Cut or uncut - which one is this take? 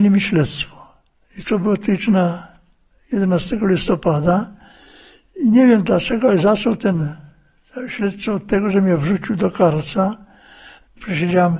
uncut